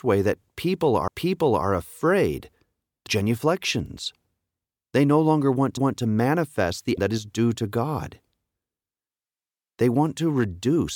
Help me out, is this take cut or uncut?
cut